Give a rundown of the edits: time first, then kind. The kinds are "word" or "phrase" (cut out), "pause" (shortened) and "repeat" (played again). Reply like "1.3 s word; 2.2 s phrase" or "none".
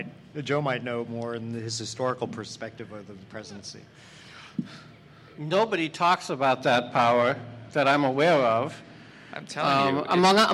7.7 s word